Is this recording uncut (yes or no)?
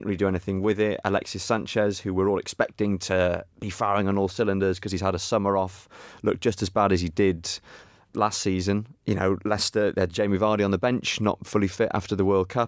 yes